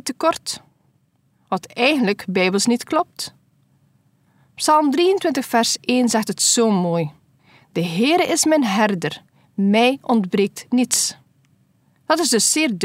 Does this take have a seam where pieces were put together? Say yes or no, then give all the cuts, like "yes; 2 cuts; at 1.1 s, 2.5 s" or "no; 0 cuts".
no; 0 cuts